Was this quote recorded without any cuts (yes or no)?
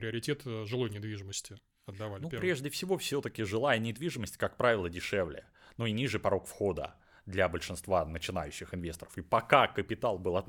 yes